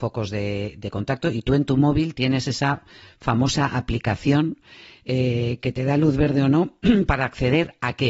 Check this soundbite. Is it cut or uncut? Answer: uncut